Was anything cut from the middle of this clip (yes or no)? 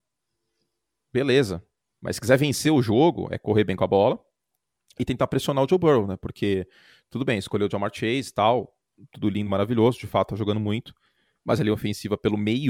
no